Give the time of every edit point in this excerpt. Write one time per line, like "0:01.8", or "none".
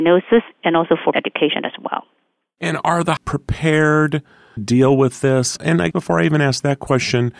0:01.1
0:03.2
0:04.6
0:05.9